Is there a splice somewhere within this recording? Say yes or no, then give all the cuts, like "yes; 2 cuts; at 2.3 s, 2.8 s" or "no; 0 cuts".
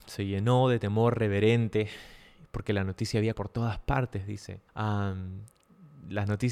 yes; 2 cuts; at 3.3 s, 4.7 s